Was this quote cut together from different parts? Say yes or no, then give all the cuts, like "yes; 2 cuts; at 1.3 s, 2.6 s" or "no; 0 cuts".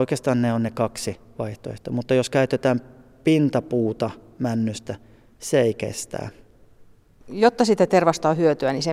no; 0 cuts